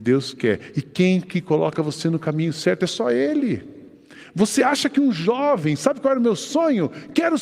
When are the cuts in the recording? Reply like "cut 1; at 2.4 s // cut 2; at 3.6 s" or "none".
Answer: none